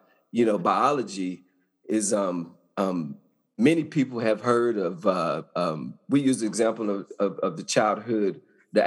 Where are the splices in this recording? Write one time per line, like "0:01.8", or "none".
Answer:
none

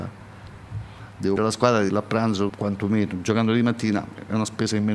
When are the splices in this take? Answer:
0:01.4
0:01.9
0:02.5

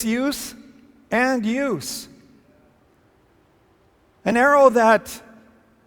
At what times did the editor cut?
none

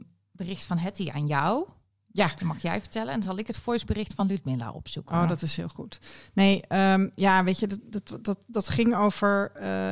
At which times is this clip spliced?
none

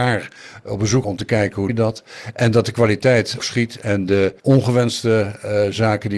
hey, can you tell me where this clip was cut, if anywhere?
0:01.0
0:01.7
0:03.4
0:04.4

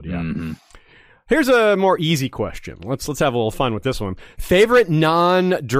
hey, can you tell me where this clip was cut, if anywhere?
none

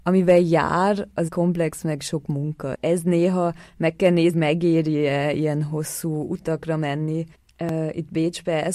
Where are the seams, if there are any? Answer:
0:01.3
0:02.7
0:04.3
0:07.3

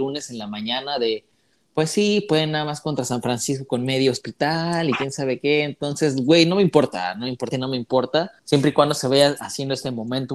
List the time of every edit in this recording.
0:07.5
0:08.4

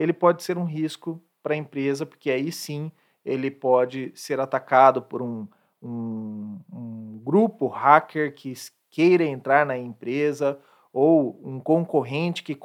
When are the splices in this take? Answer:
none

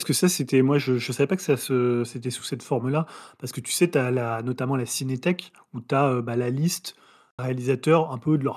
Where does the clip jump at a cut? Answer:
0:07.4

